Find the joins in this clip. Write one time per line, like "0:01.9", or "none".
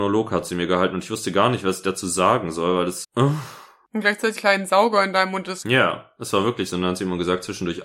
0:03.0
0:04.4
0:05.6